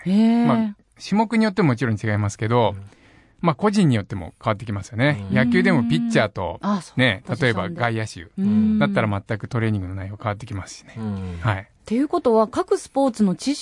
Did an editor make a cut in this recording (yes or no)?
no